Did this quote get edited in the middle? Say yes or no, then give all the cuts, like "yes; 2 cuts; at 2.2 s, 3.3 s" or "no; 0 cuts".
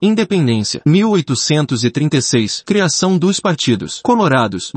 no; 0 cuts